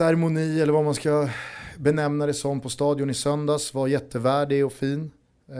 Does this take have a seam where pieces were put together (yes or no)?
no